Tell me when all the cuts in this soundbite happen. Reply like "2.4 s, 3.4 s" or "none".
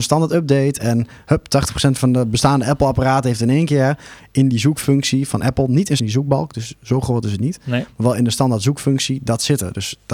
6.0 s

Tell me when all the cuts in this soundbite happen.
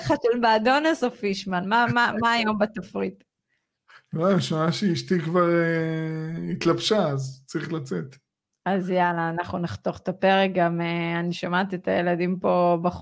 none

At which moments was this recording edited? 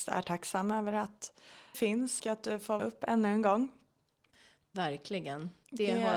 1.7 s, 2.2 s, 2.8 s

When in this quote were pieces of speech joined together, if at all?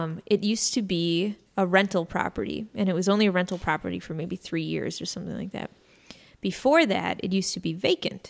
1.5 s

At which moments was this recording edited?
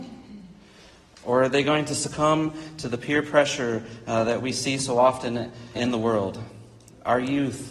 5.7 s

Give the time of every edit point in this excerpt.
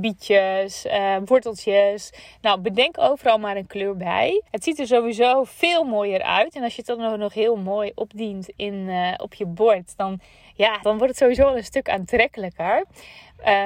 4.5 s, 10.8 s

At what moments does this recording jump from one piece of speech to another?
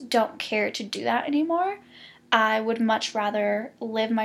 none

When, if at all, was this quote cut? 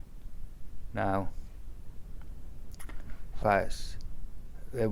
3.4 s

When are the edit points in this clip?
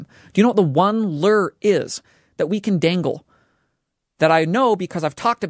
none

